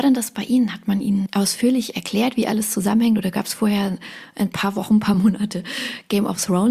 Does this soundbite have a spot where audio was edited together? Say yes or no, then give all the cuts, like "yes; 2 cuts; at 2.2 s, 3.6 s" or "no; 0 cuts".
no; 0 cuts